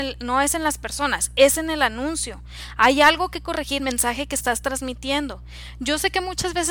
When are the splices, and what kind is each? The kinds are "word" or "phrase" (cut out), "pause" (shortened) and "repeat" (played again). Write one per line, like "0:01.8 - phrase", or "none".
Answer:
0:03.8 - phrase